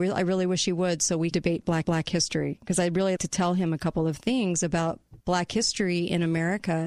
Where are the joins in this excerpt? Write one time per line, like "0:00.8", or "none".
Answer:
0:01.3
0:01.8
0:03.2
0:05.2